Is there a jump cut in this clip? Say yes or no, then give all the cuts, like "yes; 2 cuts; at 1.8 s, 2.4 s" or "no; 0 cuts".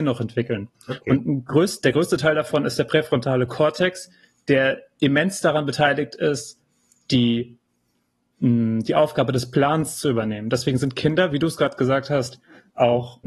no; 0 cuts